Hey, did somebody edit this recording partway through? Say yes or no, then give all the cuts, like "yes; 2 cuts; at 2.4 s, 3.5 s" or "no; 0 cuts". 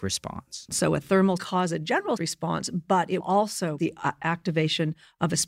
yes; 4 cuts; at 1.4 s, 2.2 s, 3.2 s, 3.8 s